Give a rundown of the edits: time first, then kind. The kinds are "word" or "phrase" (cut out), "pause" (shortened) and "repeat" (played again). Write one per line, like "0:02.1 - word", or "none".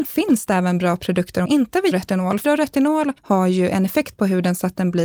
0:01.5 - word
0:01.9 - phrase
0:02.4 - word
0:03.2 - pause